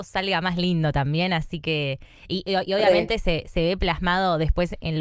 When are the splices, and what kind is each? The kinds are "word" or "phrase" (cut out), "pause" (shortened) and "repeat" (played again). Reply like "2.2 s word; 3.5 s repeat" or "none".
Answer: none